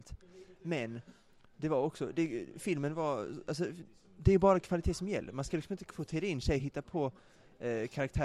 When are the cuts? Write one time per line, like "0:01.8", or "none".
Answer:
none